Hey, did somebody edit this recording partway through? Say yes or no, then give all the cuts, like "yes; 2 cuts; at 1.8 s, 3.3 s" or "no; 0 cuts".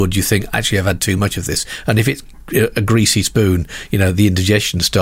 no; 0 cuts